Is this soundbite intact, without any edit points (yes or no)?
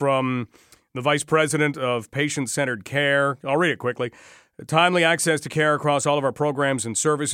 yes